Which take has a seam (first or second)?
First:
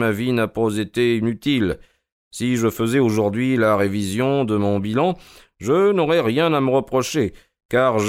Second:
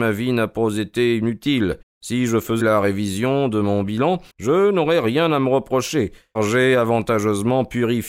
second